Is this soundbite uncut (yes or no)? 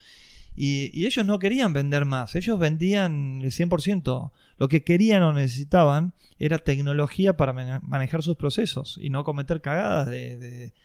yes